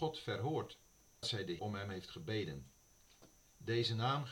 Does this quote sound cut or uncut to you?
cut